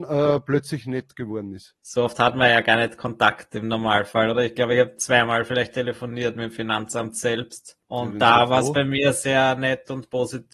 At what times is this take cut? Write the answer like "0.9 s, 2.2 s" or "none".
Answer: 7.8 s